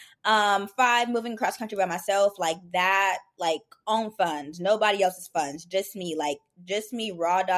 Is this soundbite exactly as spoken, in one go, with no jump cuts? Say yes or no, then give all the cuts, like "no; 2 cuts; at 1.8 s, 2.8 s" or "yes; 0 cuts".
yes; 0 cuts